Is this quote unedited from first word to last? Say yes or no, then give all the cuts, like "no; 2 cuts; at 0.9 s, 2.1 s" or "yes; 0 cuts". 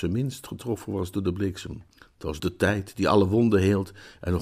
no; 2 cuts; at 1.9 s, 2.4 s